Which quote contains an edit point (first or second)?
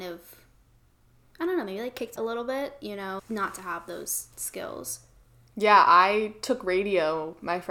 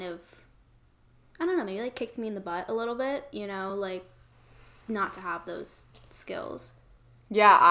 first